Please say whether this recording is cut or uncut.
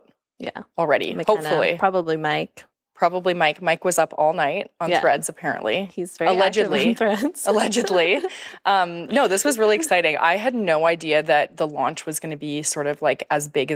uncut